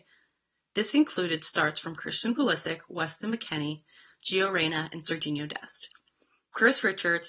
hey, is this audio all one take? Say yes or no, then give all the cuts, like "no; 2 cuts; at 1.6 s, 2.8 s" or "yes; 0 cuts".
yes; 0 cuts